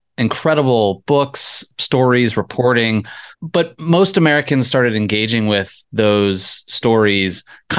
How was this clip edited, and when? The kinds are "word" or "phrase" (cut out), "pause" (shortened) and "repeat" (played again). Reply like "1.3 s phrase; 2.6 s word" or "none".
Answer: 3.3 s pause; 5.8 s pause